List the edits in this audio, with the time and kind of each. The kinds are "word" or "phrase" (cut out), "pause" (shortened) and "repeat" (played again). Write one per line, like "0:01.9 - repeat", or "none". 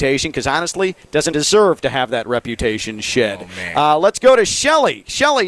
0:01.3 - word